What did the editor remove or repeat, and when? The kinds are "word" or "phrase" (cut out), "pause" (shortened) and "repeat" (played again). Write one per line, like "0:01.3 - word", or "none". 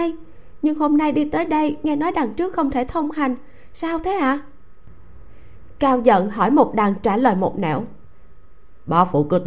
none

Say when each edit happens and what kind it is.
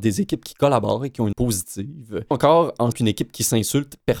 0:01.3 - word
0:02.3 - word
0:02.9 - word

